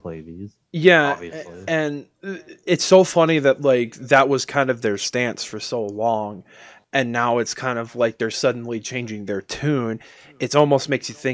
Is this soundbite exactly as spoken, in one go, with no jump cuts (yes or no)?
yes